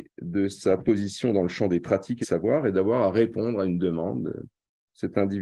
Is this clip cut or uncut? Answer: cut